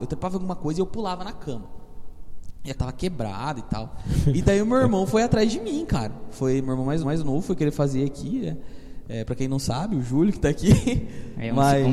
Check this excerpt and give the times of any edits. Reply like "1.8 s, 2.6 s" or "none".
2.7 s, 7.0 s